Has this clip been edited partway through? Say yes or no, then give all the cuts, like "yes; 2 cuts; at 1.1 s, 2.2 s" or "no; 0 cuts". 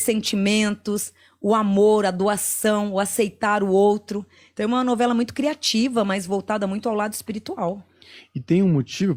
no; 0 cuts